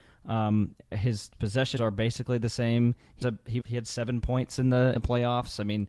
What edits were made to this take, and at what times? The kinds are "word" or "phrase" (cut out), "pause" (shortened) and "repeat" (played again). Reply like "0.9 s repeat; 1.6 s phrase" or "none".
1.3 s word; 1.8 s word; 3.2 s word; 3.6 s word; 4.9 s word